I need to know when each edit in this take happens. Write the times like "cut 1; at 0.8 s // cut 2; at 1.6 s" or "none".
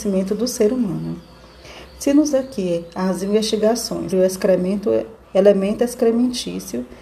cut 1; at 2.3 s // cut 2; at 4.1 s // cut 3; at 5.2 s